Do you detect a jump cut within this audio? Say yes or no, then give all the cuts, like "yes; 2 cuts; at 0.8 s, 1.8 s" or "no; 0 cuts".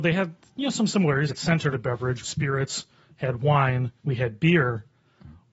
yes; 4 cuts; at 1.3 s, 1.7 s, 2.2 s, 4.0 s